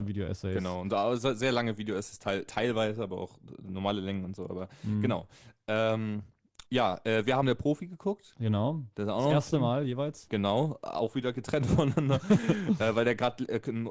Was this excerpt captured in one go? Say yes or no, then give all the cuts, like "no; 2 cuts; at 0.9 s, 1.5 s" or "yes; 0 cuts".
no; 2 cuts; at 6.7 s, 7.4 s